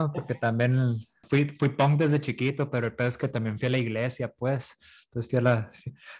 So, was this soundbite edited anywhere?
no; 0 cuts

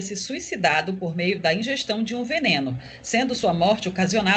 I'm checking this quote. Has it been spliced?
no; 0 cuts

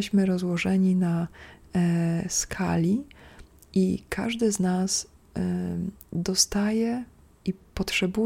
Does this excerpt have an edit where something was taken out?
no; 0 cuts

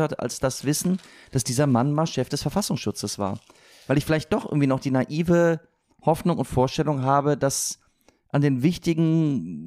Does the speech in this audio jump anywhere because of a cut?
no; 0 cuts

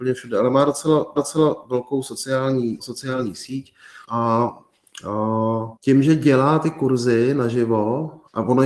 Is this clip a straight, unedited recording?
no; 4 cuts; at 1.2 s, 2.8 s, 4.0 s, 5.8 s

